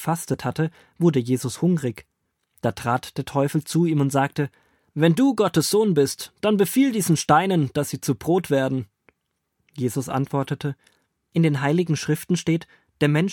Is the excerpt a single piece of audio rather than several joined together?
yes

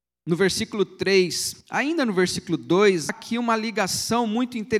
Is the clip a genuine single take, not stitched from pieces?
no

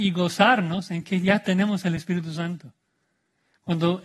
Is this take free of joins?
yes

